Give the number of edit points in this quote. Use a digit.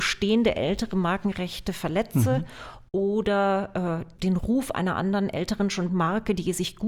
2